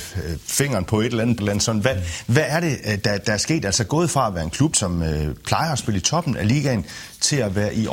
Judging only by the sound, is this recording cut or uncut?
cut